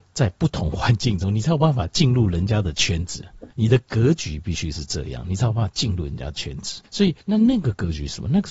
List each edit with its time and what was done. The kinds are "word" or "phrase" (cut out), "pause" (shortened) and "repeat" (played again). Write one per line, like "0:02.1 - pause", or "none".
0:03.5 - pause
0:06.8 - pause
0:07.2 - pause